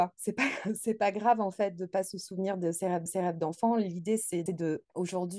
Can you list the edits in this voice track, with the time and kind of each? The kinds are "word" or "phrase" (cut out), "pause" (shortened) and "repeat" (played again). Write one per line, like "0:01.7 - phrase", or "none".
0:03.1 - repeat
0:04.5 - word